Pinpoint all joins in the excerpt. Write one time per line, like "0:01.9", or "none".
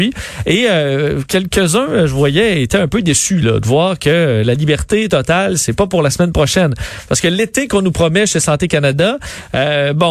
none